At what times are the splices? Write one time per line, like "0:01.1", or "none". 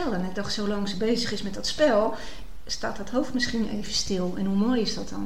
none